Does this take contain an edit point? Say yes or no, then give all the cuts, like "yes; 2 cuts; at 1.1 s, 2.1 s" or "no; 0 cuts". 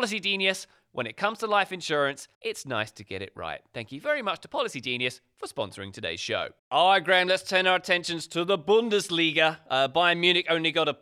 yes; 2 cuts; at 2.3 s, 6.6 s